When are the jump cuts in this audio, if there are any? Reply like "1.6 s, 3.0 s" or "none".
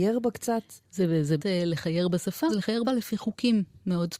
1.4 s, 2.5 s, 2.8 s